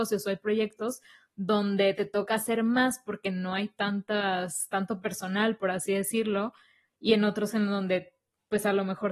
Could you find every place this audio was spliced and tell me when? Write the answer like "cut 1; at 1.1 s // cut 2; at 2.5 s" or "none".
none